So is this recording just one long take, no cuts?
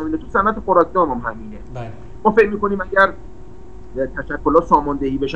yes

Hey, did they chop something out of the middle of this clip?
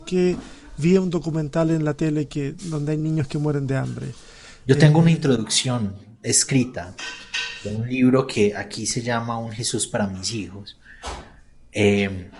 no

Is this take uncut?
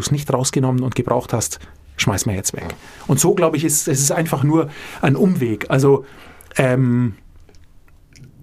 yes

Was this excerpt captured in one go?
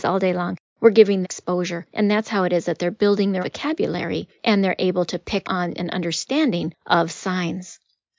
no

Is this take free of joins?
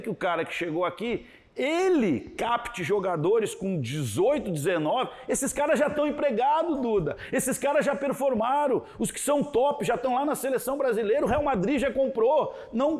yes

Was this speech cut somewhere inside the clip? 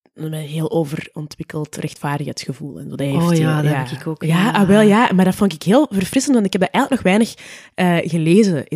no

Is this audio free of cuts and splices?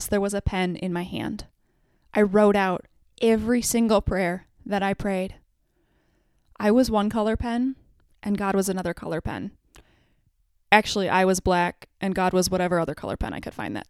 yes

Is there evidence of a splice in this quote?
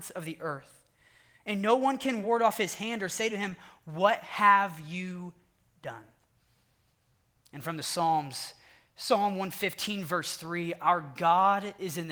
no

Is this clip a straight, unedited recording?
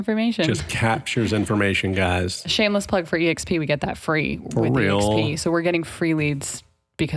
yes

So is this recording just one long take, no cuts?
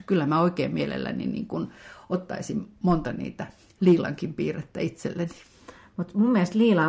yes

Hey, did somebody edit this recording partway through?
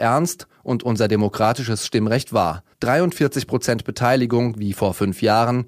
yes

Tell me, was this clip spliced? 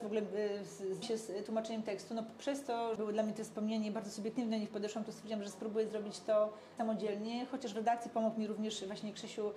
yes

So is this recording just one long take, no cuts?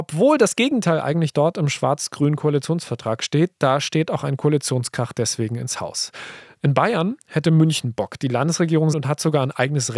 no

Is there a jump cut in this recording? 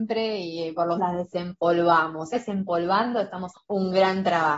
yes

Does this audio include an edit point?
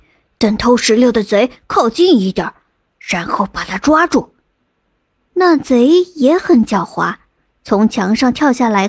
no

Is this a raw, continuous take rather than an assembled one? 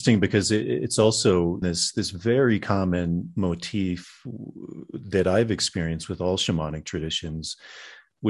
no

